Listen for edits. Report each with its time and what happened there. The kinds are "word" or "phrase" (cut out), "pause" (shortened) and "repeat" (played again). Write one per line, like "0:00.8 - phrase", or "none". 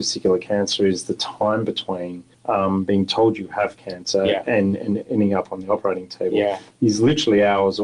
0:02.3 - pause